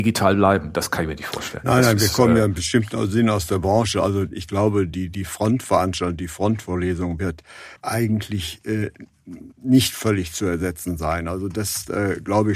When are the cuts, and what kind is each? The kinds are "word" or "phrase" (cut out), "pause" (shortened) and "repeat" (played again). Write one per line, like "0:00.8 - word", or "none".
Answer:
0:07.8 - pause
0:09.5 - pause